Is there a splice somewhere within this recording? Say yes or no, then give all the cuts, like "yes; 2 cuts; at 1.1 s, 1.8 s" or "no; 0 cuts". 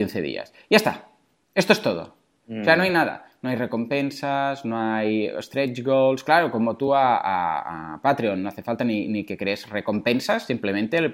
no; 0 cuts